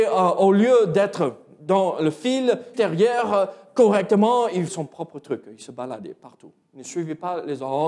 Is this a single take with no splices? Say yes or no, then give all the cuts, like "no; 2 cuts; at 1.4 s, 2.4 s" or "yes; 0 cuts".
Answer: no; 3 cuts; at 2.7 s, 4.7 s, 6.6 s